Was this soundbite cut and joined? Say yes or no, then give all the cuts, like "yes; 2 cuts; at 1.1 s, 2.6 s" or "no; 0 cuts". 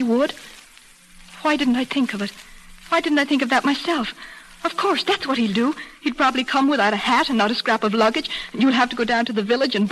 yes; 2 cuts; at 2.8 s, 6.0 s